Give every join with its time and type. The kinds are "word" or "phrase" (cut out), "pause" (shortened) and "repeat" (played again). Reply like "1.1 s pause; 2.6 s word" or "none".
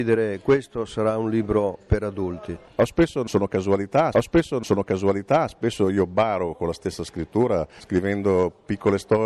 4.1 s repeat